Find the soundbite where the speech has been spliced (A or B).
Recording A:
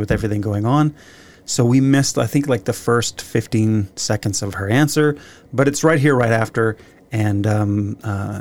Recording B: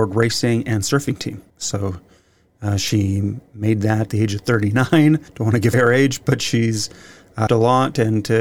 B